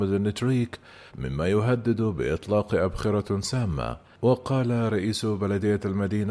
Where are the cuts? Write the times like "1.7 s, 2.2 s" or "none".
1.1 s